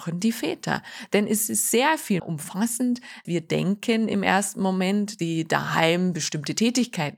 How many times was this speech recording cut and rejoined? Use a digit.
3